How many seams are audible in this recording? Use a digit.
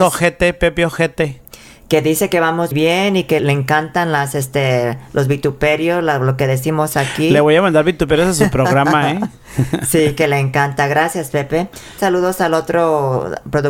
3